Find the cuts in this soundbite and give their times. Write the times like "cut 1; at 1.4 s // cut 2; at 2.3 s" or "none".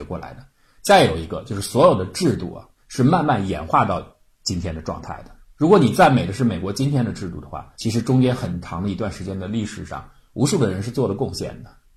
cut 1; at 2.8 s // cut 2; at 7.7 s